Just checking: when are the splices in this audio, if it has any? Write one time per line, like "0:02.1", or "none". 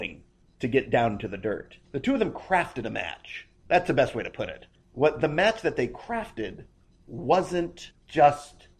0:01.8